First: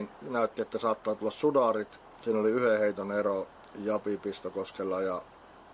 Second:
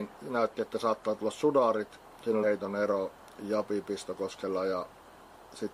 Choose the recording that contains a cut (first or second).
second